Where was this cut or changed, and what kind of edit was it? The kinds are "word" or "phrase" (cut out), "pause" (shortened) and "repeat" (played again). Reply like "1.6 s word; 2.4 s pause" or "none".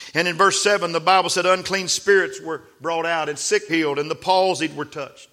3.7 s word

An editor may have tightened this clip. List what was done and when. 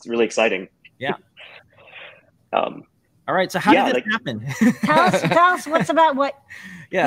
none

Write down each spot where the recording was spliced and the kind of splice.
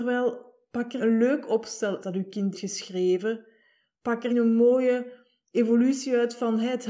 1.0 s word; 2.0 s word; 2.5 s word; 4.3 s word

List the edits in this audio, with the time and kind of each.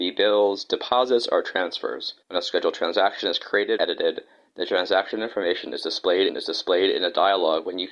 2.2 s pause; 3.8 s word; 6.3 s repeat

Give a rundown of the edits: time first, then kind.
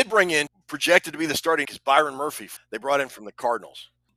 1.6 s word

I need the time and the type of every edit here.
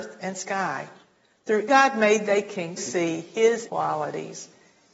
1.7 s word; 2.8 s word; 3.7 s word

